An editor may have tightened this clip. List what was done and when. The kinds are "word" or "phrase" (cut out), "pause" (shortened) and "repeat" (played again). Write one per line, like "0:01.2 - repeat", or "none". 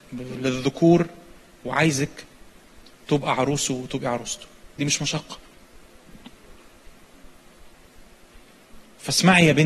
none